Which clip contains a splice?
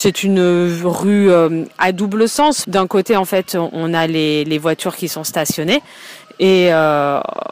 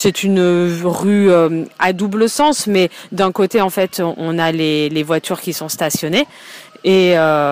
first; 1 cut; at 2.6 s

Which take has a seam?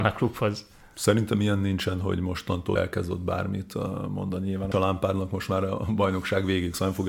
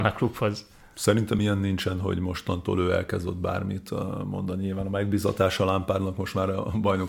first; 2 cuts; at 2.8 s, 4.7 s

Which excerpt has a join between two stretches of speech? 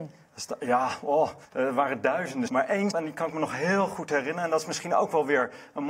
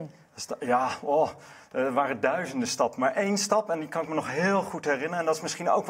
first; 3 cuts; at 1.4 s, 2.5 s, 2.9 s

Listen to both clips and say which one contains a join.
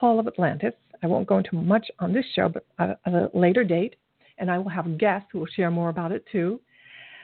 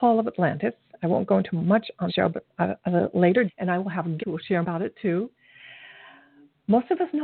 second; 4 cuts; at 2.1 s, 3.5 s, 4.2 s, 4.6 s

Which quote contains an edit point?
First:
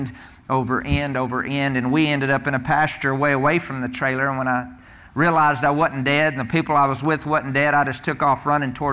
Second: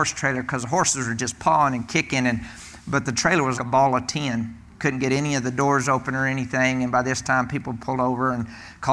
second; 1 cut; at 3.6 s

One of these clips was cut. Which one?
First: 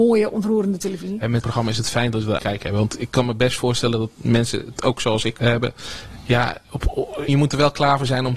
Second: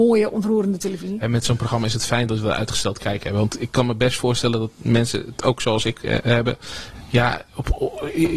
first; 4 cuts; at 1.4 s, 2.4 s, 5.4 s, 7.3 s

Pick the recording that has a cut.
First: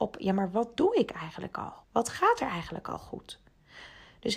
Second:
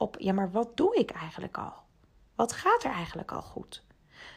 first; 1 cut; at 1.8 s

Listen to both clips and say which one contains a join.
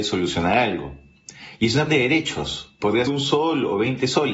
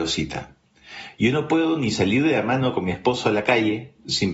first; 2 cuts; at 1.9 s, 3.1 s

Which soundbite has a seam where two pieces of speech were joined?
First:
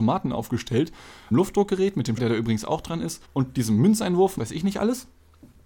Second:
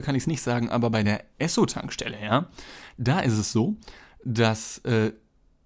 first; 4 cuts; at 1.3 s, 2.2 s, 3.2 s, 4.4 s

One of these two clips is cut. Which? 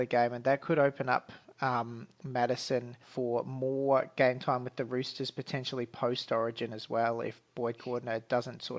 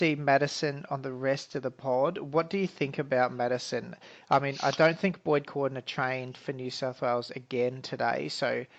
first; 1 cut; at 3.0 s

